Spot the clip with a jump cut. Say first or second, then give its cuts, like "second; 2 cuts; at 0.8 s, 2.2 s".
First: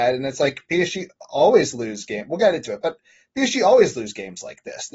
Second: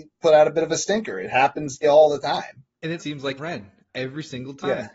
second; 3 cuts; at 1.8 s, 3.0 s, 3.4 s